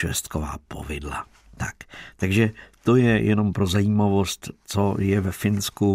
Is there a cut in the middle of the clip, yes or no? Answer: no